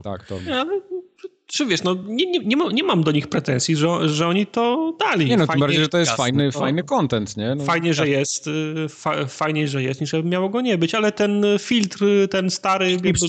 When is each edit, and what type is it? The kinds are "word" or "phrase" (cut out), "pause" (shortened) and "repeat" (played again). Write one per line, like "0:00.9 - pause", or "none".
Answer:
none